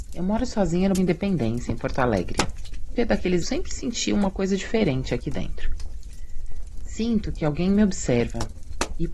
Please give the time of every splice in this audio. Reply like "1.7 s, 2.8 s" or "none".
0.9 s, 3.0 s, 3.4 s

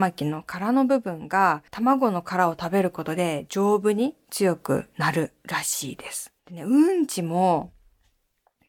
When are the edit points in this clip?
1.7 s, 6.4 s

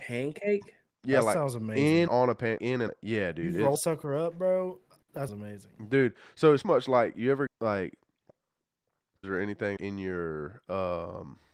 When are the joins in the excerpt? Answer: 2.1 s, 2.6 s, 2.9 s, 3.8 s, 5.3 s, 6.6 s, 7.5 s, 9.2 s, 9.8 s

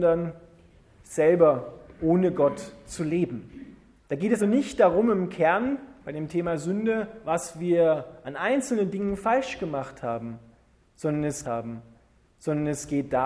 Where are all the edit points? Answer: 4.0 s, 4.4 s, 11.4 s

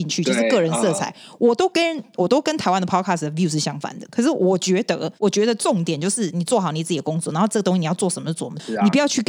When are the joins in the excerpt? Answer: 5.2 s

